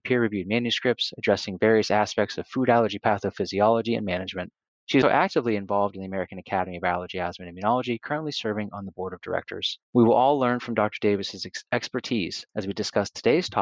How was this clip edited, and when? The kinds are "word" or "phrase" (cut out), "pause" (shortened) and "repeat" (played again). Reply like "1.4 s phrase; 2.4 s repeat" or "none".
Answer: 4.7 s pause; 5.0 s word; 9.8 s pause; 12.5 s pause